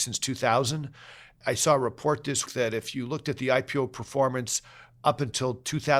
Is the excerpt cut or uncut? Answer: cut